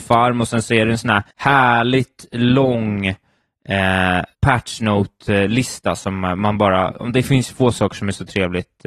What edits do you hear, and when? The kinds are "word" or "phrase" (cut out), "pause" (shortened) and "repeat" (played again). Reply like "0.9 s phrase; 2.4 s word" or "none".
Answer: 1.3 s pause; 4.3 s pause